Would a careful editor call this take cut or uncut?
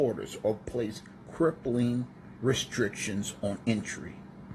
uncut